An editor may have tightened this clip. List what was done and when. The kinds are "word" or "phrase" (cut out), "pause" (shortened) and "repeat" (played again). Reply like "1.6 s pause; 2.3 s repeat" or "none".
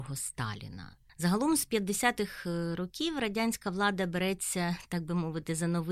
1.1 s pause